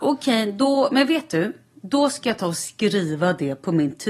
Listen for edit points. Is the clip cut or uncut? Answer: uncut